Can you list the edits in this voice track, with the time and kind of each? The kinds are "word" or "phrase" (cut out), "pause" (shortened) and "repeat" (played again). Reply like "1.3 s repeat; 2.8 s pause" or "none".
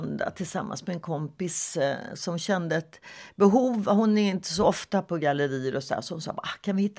none